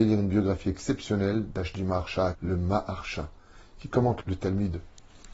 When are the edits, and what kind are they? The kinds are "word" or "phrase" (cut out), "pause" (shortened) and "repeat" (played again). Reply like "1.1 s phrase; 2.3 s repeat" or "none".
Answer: 1.7 s word; 2.3 s word; 4.2 s word

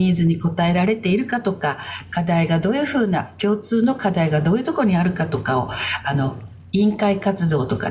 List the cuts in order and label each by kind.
none

